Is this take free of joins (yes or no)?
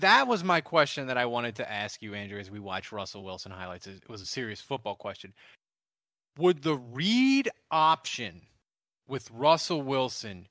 yes